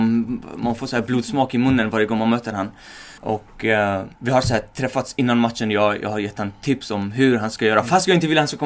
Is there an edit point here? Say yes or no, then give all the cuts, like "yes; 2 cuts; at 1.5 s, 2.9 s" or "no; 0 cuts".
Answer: yes; 2 cuts; at 3.2 s, 4.2 s